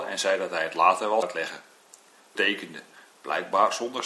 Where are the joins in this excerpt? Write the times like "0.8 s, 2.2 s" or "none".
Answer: 1.2 s, 2.3 s

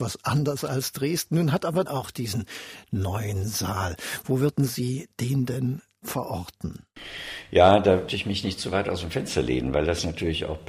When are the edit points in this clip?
1.9 s, 8.1 s

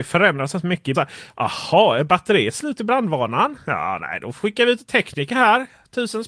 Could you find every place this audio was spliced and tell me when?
0.9 s

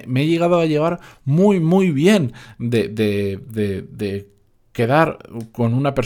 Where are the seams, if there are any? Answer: none

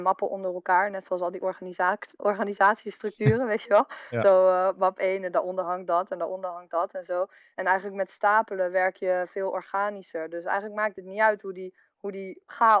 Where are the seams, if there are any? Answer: none

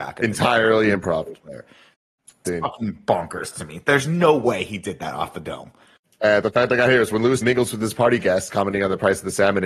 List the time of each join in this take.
2.4 s, 6.4 s, 7.4 s

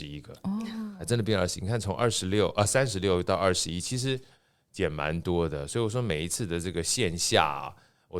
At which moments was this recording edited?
none

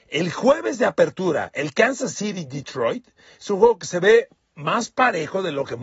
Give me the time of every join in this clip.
none

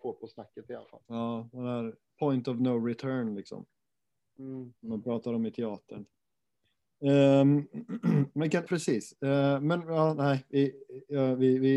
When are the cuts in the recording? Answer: 1.1 s, 4.8 s, 8.7 s

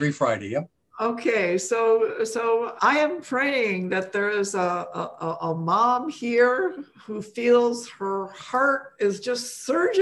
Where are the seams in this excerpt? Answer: 2.8 s

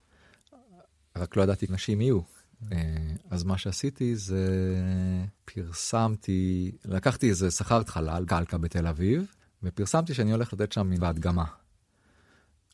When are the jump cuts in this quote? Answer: 1.7 s, 5.3 s, 7.9 s, 8.3 s, 9.4 s, 11.0 s

